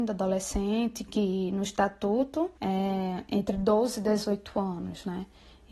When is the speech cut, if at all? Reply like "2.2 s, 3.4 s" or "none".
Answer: 2.6 s